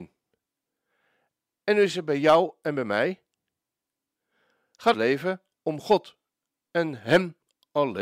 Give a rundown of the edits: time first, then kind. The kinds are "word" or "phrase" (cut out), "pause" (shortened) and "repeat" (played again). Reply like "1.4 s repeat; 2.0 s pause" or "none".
4.9 s phrase